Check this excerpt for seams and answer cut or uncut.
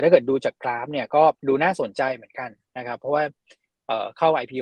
cut